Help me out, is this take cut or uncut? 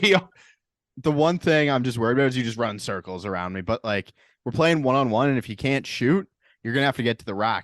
uncut